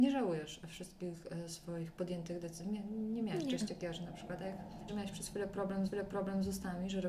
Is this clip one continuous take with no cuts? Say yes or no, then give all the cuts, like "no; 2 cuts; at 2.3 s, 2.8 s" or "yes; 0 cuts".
no; 2 cuts; at 4.9 s, 5.9 s